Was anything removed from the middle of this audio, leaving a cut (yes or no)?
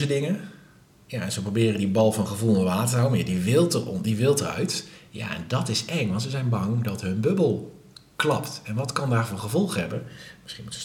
no